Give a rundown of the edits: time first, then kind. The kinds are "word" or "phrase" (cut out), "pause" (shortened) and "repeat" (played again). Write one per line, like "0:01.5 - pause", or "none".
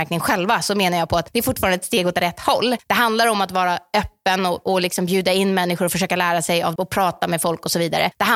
0:06.8 - phrase